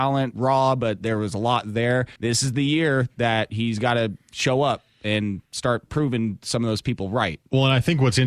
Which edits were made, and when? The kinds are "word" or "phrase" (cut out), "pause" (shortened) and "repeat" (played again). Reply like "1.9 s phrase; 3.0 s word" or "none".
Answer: 2.2 s pause